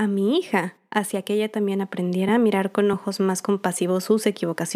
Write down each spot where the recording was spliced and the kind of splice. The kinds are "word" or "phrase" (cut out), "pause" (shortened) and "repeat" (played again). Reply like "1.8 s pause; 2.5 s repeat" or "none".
none